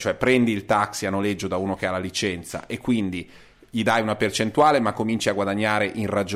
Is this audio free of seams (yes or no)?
yes